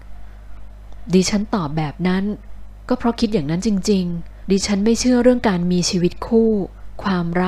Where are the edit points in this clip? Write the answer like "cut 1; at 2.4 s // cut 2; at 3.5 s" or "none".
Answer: cut 1; at 4.4 s